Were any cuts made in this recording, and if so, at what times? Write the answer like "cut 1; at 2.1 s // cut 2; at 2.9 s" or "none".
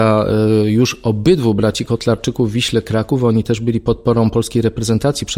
none